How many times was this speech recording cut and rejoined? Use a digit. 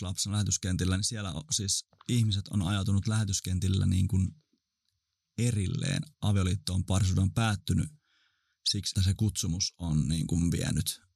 4